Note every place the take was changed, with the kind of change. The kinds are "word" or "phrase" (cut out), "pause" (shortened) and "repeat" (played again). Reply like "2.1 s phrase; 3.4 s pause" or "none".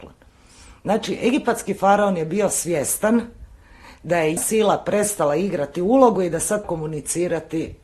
4.4 s word; 6.6 s word